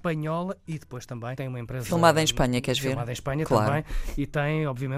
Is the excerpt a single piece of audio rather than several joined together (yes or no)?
no